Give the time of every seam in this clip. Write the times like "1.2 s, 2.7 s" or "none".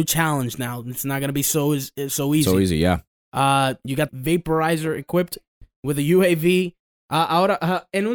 3.1 s, 4.1 s